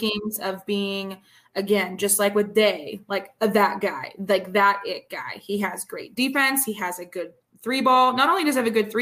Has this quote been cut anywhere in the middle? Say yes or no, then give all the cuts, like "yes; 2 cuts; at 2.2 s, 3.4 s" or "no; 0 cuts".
no; 0 cuts